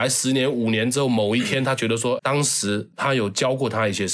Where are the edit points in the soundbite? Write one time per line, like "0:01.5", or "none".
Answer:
0:02.2